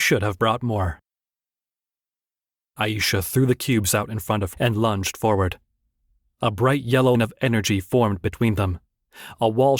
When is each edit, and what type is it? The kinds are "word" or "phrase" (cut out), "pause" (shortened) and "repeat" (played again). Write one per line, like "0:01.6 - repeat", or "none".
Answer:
0:04.5 - word
0:07.1 - word